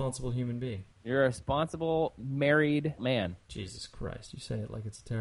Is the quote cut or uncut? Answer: cut